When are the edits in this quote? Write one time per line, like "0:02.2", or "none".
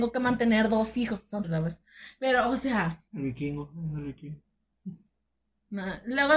0:01.4
0:03.1